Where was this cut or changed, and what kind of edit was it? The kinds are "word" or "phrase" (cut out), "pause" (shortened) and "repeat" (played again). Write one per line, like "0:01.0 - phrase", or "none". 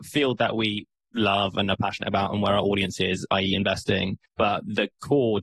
0:04.3 - pause